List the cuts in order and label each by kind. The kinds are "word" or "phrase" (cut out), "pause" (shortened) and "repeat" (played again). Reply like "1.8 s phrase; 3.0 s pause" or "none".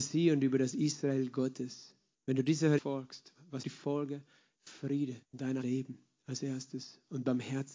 2.1 s pause; 2.8 s word; 3.6 s phrase; 5.2 s pause; 5.6 s word